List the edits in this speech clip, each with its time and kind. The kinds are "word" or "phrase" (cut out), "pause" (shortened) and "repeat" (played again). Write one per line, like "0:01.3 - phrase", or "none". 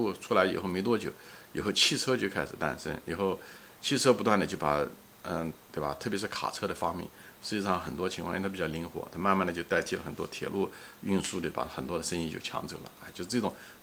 0:05.6 - pause